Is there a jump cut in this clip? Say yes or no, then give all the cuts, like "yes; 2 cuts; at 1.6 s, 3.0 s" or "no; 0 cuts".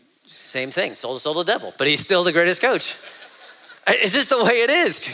yes; 1 cut; at 3.8 s